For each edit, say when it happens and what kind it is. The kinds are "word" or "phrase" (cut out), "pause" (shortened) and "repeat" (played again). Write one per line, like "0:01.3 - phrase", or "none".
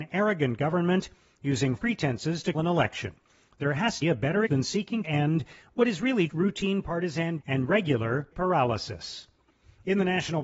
0:01.8 - word
0:02.5 - word
0:04.0 - word
0:04.5 - word
0:05.0 - word
0:06.3 - word
0:07.4 - word
0:08.3 - word